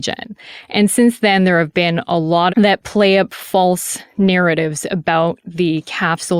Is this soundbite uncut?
no; 1 cut; at 2.5 s

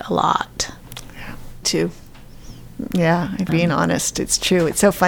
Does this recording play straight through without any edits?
no; 2 cuts; at 1.6 s, 3.5 s

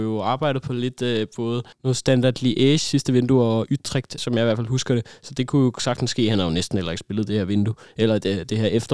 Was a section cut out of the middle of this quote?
yes; 2 cuts; at 1.7 s, 4.2 s

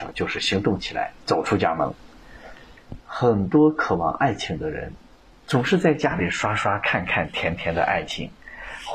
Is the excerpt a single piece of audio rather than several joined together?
no; 1 cut; at 1.2 s

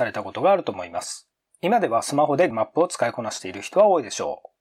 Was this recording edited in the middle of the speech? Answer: yes; 1 cut; at 2.5 s

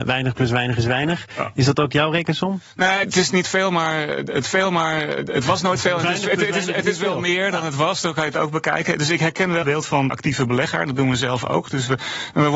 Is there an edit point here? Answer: yes; 4 cuts; at 3.0 s, 4.4 s, 9.6 s, 10.1 s

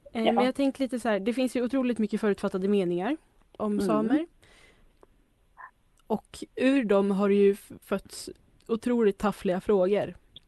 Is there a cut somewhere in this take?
yes; 3 cuts; at 3.6 s, 6.5 s, 7.8 s

